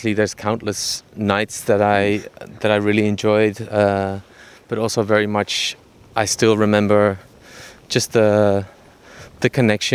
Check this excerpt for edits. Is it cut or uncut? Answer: uncut